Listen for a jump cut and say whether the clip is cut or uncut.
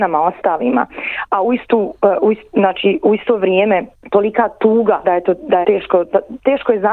cut